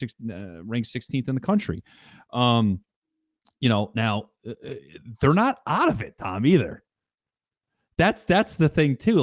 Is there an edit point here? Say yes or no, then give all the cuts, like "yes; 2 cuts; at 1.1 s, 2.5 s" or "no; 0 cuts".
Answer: no; 0 cuts